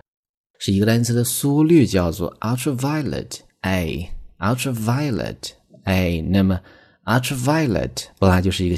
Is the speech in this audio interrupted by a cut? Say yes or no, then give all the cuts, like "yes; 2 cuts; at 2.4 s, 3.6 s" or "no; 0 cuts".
no; 0 cuts